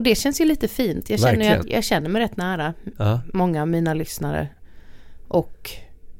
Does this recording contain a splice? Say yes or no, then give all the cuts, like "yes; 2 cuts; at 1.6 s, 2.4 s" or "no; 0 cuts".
yes; 1 cut; at 1.6 s